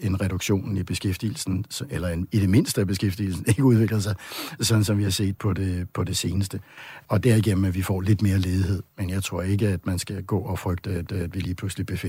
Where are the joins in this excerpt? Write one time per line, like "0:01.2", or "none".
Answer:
0:05.4
0:11.1